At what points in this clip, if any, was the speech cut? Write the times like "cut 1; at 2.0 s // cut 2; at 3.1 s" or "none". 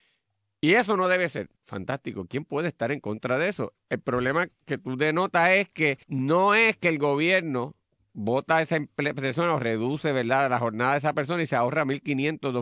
cut 1; at 1.6 s // cut 2; at 6.0 s

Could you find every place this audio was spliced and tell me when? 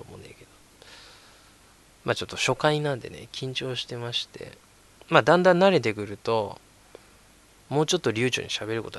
none

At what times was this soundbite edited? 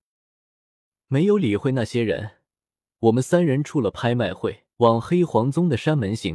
cut 1; at 4.7 s

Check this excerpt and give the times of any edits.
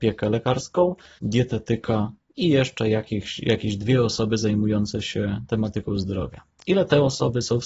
cut 1; at 1.2 s

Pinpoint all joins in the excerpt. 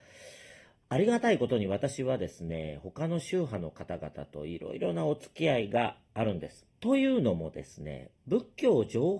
cut 1; at 6.7 s // cut 2; at 8.2 s

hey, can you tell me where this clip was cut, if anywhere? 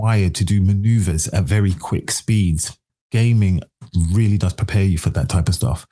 cut 1; at 2.9 s

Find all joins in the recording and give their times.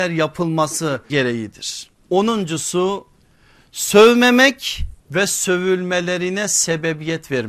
cut 1; at 1.1 s // cut 2; at 2.0 s // cut 3; at 5.0 s

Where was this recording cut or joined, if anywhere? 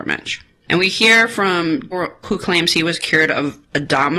cut 1; at 1.9 s // cut 2; at 2.2 s

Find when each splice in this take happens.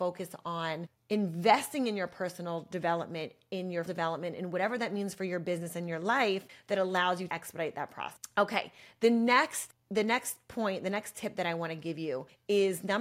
cut 1; at 3.8 s // cut 2; at 7.3 s

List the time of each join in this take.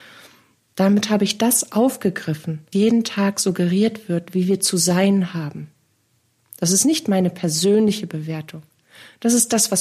cut 1; at 2.7 s

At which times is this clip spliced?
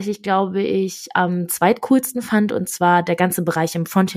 none

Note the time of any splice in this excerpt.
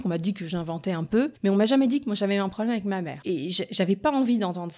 cut 1; at 1.4 s

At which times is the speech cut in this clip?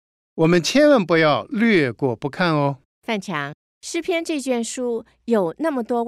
cut 1; at 2.9 s // cut 2; at 3.6 s

